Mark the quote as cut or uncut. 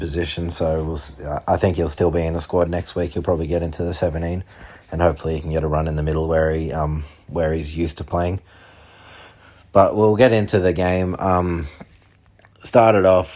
uncut